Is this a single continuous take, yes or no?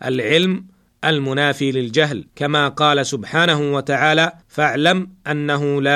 no